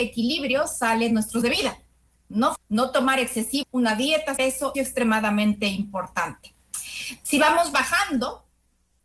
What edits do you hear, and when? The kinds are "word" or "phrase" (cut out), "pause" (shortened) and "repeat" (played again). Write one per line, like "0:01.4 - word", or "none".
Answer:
0:01.4 - word
0:02.6 - word
0:03.6 - word
0:04.4 - phrase
0:04.7 - word